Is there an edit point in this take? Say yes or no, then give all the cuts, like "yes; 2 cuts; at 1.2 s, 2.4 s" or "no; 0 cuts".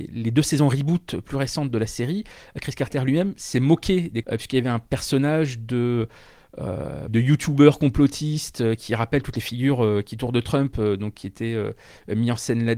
yes; 3 cuts; at 4.2 s, 7.1 s, 10.3 s